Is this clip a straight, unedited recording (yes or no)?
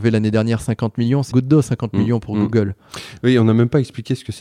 no